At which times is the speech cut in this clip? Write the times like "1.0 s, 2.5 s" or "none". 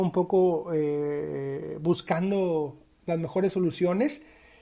none